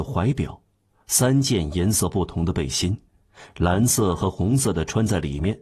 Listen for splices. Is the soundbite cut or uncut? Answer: uncut